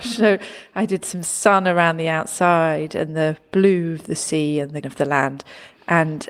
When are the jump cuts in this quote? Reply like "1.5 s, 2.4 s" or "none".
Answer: 4.8 s